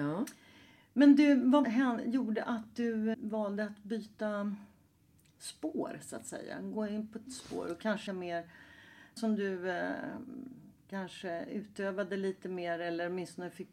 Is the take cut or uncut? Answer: cut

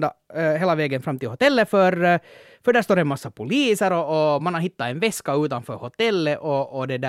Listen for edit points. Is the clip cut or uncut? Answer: uncut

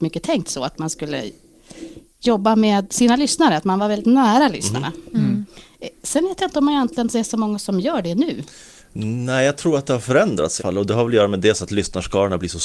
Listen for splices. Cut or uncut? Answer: cut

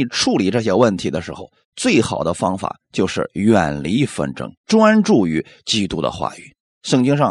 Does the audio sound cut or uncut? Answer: cut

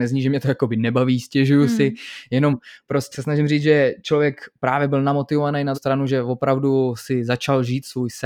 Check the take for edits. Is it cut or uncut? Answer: cut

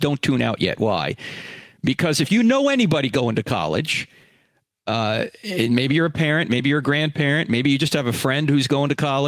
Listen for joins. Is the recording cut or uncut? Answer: uncut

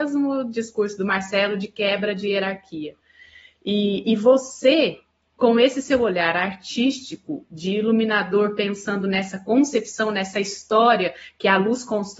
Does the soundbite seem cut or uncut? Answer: uncut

